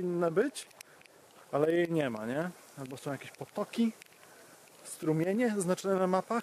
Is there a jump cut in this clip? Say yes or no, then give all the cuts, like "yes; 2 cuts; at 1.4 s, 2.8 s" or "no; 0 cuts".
no; 0 cuts